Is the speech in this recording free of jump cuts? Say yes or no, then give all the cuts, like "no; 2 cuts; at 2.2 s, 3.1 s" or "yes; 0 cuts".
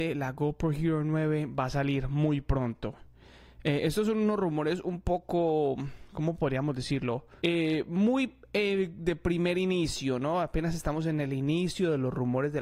no; 1 cut; at 7.4 s